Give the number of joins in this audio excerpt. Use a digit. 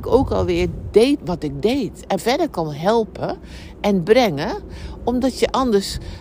2